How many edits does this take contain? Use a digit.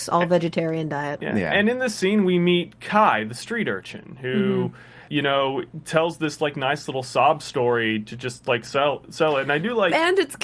1